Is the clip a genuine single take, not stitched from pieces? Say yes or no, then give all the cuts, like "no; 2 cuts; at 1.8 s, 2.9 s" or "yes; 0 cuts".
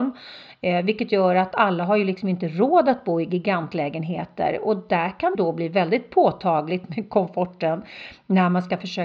no; 2 cuts; at 1.5 s, 5.3 s